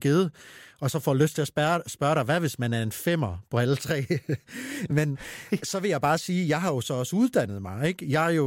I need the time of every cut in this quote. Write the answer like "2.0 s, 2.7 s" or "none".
none